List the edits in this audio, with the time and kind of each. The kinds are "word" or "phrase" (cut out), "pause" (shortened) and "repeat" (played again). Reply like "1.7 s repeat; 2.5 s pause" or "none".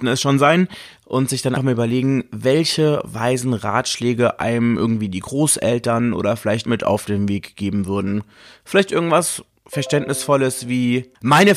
1.6 s word; 6.7 s phrase